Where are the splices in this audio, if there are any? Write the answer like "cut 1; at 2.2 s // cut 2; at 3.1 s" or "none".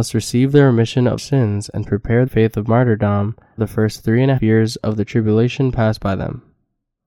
cut 1; at 1.2 s // cut 2; at 2.3 s // cut 3; at 3.6 s // cut 4; at 4.4 s